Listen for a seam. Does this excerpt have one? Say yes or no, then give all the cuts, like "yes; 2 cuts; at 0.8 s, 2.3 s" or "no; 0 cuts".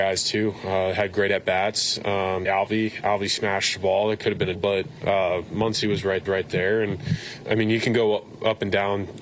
yes; 4 cuts; at 2.4 s, 4.5 s, 6.2 s, 7.4 s